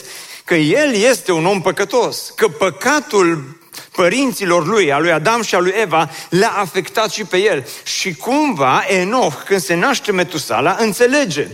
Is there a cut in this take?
no; 0 cuts

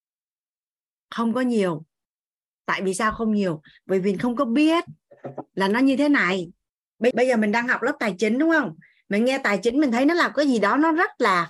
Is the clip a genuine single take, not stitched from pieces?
no; 1 cut; at 7.1 s

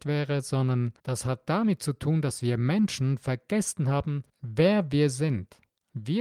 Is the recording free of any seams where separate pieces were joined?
no; 2 cuts; at 1.0 s, 4.3 s

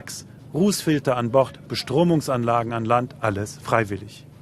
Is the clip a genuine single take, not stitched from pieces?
yes; 0 cuts

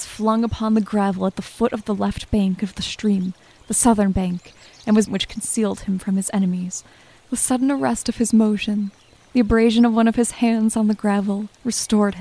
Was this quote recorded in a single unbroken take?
no; 1 cut; at 5.1 s

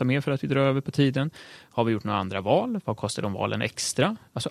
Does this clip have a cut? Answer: no; 0 cuts

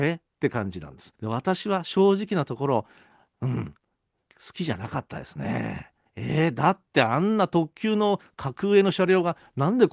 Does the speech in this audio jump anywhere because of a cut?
yes; 2 cuts; at 1.2 s, 6.1 s

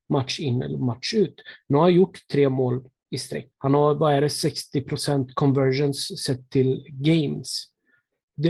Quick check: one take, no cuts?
no; 1 cut; at 3.5 s

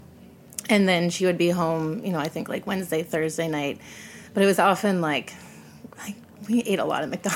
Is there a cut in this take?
no; 0 cuts

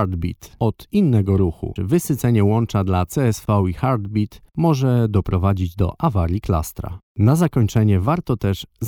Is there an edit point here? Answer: yes; 1 cut; at 1.8 s

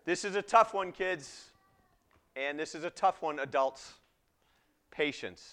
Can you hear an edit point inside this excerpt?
no; 0 cuts

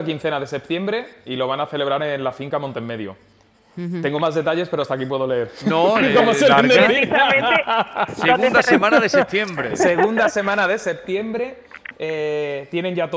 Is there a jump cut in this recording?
no; 0 cuts

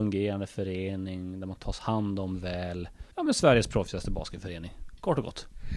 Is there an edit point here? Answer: yes; 1 cut; at 3.1 s

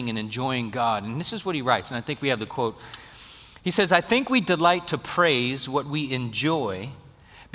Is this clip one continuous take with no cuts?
yes; 0 cuts

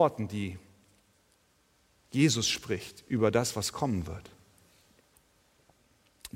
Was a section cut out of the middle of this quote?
no; 0 cuts

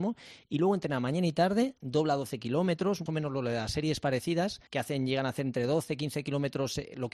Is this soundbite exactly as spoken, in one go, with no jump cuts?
no; 2 cuts; at 3.1 s, 4.7 s

